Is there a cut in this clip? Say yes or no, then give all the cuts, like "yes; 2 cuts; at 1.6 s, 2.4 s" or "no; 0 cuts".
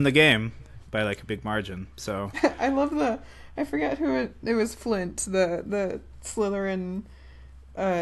yes; 2 cuts; at 1.3 s, 1.9 s